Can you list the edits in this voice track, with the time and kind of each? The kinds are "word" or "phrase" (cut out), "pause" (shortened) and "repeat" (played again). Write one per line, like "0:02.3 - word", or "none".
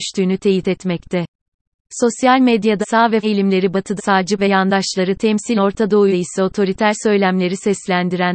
0:02.8 - word
0:03.2 - word
0:04.0 - word
0:04.4 - word
0:05.6 - word
0:06.1 - word